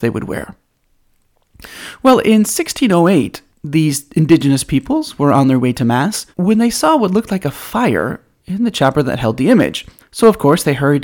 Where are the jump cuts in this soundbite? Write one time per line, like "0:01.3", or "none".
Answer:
0:03.5
0:06.3
0:10.0